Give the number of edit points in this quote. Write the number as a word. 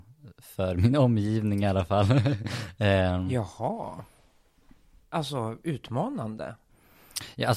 zero